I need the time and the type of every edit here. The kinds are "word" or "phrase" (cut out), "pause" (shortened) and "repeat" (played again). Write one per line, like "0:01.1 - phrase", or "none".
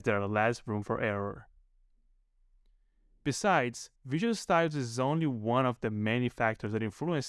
0:04.0 - pause